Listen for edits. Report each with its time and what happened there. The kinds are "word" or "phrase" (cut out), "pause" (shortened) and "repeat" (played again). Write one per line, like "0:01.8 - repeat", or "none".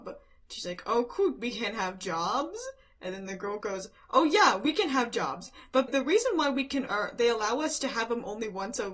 0:05.9 - word
0:06.9 - word